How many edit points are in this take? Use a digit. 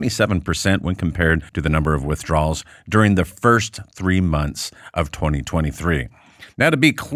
1